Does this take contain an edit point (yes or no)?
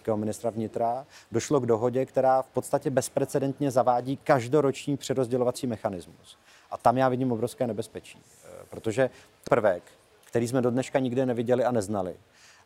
yes